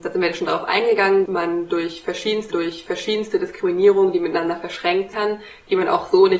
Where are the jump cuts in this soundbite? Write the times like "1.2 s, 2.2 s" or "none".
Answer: 1.3 s, 2.5 s, 5.1 s